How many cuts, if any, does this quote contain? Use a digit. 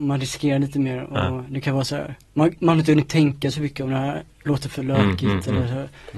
1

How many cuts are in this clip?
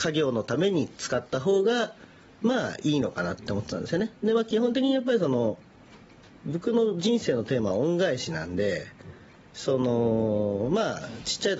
0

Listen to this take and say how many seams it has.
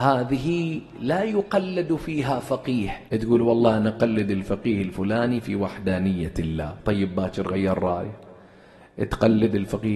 1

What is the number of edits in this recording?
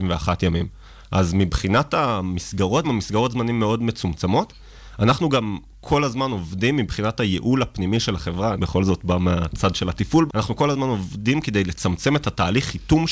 3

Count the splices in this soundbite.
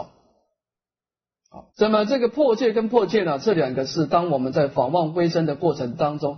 1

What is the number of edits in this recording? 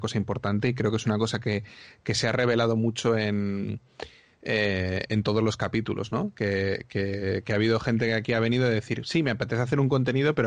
0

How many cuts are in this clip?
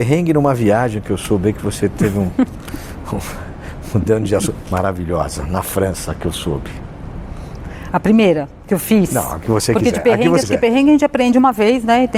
2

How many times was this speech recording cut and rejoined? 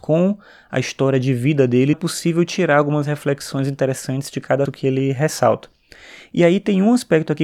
2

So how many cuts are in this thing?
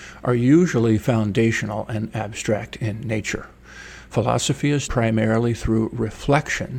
1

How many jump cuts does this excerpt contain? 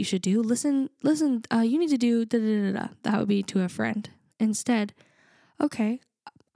0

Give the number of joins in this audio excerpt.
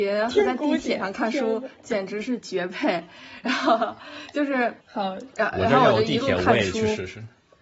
1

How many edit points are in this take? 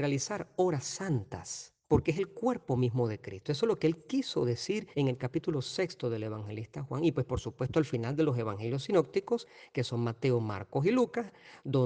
2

